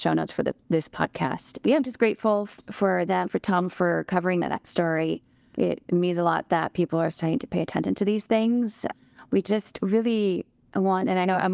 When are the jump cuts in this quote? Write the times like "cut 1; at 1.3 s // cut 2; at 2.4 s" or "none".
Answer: none